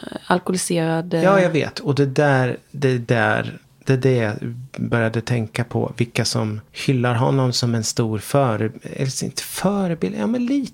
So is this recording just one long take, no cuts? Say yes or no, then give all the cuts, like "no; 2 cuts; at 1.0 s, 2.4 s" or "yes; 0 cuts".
no; 2 cuts; at 3.6 s, 6.7 s